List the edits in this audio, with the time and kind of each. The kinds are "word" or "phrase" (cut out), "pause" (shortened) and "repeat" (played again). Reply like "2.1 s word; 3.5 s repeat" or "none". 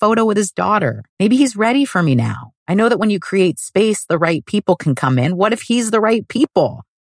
1.1 s pause; 2.6 s pause